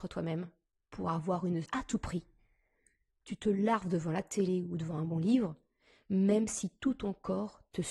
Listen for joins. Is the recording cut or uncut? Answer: cut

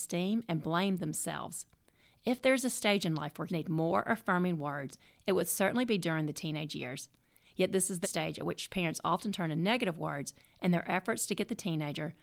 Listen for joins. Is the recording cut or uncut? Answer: cut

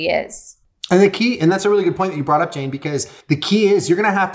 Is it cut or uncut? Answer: cut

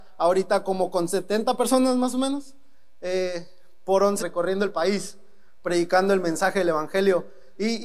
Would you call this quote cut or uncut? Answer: cut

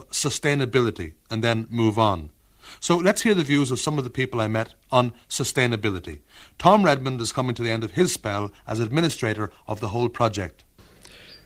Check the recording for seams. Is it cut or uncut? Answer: uncut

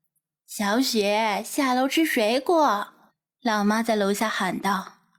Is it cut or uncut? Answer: cut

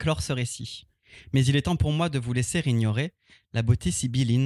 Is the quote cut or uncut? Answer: uncut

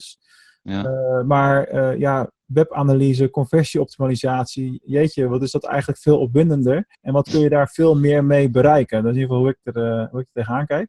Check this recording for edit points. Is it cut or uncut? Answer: cut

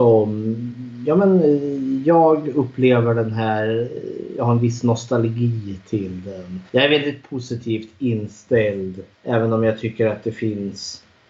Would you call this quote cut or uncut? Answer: cut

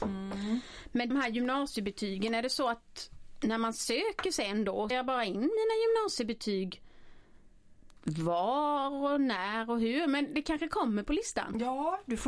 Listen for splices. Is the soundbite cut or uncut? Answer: cut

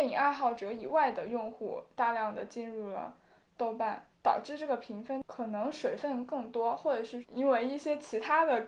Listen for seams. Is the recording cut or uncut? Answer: uncut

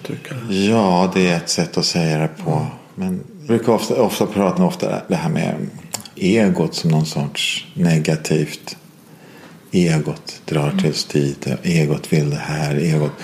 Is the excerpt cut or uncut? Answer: cut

